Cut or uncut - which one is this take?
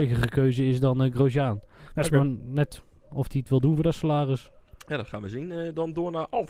uncut